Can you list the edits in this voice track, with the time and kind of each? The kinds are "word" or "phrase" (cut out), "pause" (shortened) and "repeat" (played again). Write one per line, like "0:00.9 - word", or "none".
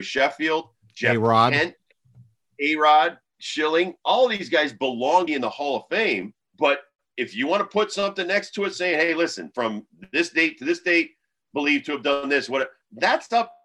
0:05.3 - word
0:06.4 - pause